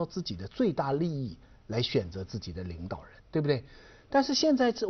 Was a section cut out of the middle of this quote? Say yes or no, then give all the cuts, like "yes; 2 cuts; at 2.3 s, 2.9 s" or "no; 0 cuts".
yes; 1 cut; at 3.2 s